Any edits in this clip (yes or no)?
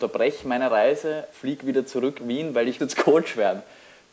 yes